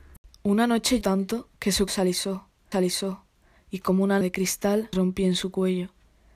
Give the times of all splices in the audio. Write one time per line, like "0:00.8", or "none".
0:01.0
0:01.6
0:01.9
0:02.7
0:04.2
0:04.9